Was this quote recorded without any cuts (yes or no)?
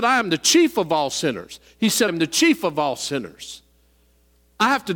no